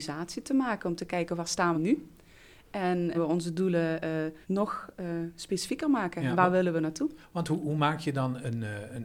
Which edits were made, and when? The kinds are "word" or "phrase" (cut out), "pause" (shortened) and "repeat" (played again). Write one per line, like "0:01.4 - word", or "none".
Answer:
0:01.7 - phrase
0:03.1 - phrase
0:04.4 - pause